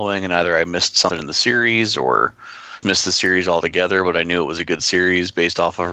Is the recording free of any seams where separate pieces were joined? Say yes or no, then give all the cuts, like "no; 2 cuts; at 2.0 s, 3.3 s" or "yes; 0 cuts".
no; 1 cut; at 2.8 s